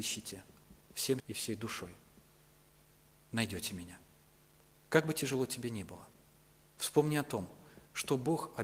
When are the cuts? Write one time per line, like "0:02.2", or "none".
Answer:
0:01.2